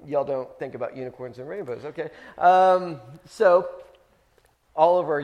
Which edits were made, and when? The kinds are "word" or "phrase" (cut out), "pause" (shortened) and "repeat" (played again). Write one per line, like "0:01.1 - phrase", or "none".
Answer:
none